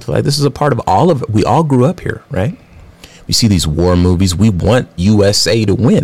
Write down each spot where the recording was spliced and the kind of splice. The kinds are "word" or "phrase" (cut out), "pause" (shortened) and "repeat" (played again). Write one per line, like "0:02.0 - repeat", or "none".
0:05.0 - word